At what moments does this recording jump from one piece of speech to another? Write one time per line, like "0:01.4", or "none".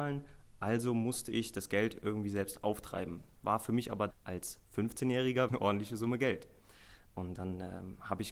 0:04.1
0:05.5